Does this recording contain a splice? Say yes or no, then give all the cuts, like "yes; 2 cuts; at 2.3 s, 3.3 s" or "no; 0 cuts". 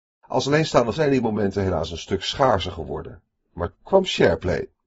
yes; 2 cuts; at 1.0 s, 3.7 s